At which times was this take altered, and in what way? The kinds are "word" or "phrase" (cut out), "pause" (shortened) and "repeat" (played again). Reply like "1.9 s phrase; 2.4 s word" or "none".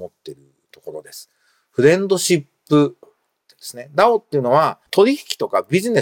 3.0 s word; 4.9 s pause